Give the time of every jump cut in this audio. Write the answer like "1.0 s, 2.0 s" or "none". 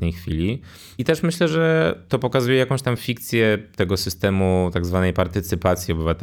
none